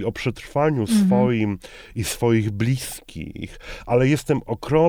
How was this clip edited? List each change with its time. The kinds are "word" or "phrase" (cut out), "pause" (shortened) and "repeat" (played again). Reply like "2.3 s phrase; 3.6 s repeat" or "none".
none